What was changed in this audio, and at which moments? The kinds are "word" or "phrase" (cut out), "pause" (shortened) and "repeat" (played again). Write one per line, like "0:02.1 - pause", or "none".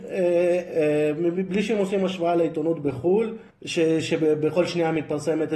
0:03.5 - pause